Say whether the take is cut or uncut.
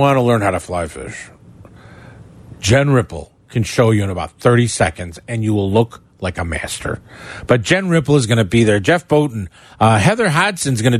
uncut